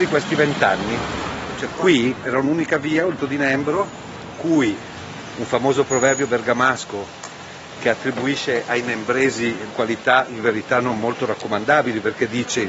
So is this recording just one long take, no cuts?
no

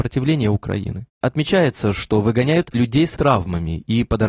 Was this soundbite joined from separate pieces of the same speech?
yes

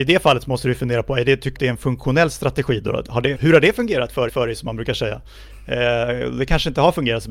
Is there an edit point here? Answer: yes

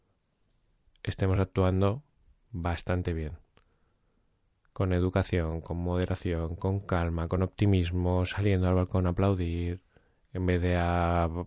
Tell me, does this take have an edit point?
no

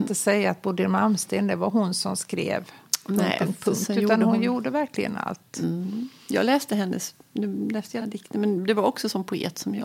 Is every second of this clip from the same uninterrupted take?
no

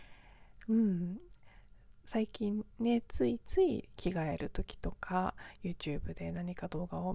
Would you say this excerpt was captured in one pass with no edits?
yes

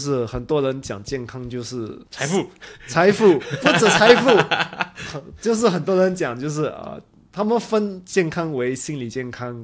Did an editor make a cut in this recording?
no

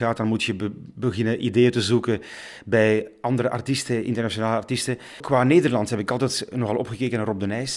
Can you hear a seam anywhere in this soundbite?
no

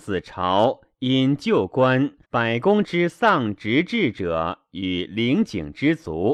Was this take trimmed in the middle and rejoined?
yes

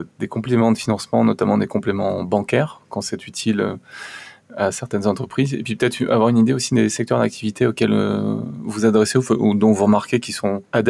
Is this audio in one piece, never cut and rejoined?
yes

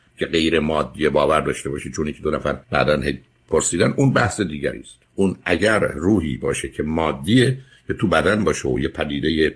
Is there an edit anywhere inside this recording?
yes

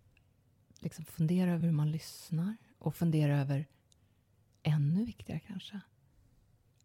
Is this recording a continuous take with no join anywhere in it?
yes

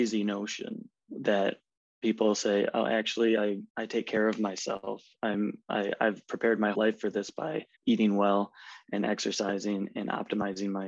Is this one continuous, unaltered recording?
no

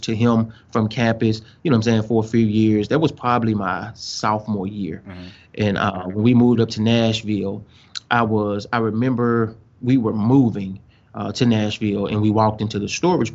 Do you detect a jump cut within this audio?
no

